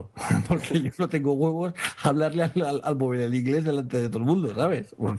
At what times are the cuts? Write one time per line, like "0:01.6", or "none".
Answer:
none